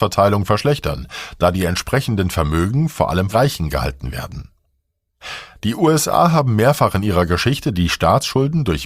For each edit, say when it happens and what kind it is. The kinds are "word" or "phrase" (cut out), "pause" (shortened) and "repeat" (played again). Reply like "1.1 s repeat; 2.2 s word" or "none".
3.3 s word